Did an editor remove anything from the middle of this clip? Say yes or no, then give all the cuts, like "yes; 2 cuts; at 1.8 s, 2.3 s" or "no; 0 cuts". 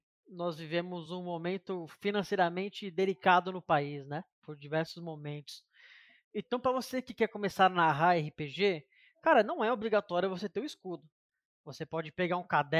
no; 0 cuts